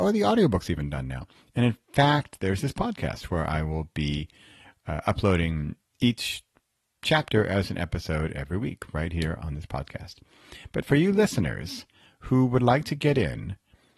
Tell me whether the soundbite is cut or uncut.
uncut